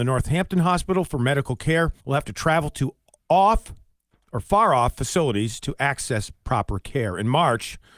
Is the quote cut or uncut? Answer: cut